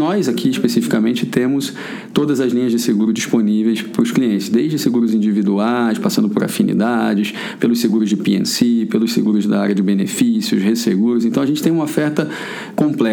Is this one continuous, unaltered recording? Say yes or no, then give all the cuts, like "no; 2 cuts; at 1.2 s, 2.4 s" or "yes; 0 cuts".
yes; 0 cuts